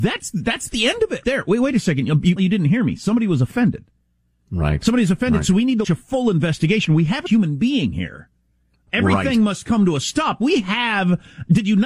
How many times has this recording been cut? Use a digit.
4